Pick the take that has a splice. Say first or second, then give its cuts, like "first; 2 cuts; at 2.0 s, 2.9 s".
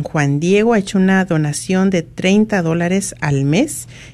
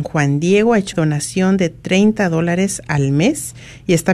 second; 1 cut; at 0.9 s